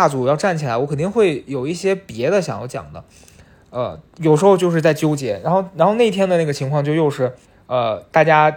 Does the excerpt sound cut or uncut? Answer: cut